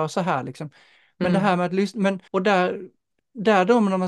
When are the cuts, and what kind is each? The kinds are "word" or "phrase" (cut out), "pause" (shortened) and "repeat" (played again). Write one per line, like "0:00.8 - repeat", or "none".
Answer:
0:02.3 - pause